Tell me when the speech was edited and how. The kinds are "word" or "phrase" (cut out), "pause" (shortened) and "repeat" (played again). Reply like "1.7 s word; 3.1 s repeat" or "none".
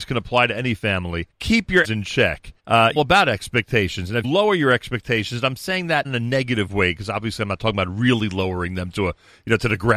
1.3 s pause; 1.8 s word; 2.6 s pause; 3.0 s phrase; 4.2 s word; 6.0 s word